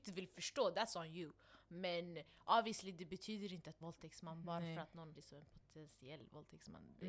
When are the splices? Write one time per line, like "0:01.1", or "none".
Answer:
0:03.8
0:05.1